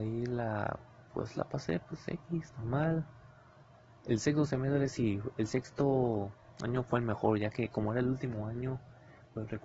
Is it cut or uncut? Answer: uncut